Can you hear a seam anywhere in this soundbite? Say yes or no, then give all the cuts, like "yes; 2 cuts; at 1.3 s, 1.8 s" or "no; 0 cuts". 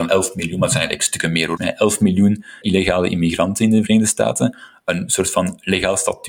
yes; 2 cuts; at 1.6 s, 2.6 s